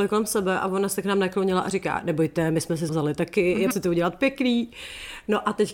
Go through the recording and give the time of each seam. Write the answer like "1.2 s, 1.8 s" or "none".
2.9 s, 3.7 s